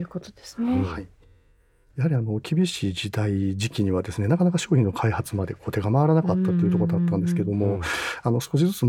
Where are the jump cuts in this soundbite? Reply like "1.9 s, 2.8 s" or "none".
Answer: none